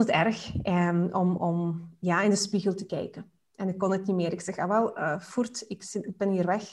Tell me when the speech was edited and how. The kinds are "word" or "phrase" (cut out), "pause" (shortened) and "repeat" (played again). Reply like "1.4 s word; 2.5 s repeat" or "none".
1.4 s word